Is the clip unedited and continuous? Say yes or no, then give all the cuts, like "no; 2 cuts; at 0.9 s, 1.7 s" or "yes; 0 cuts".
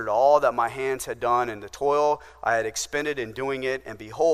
yes; 0 cuts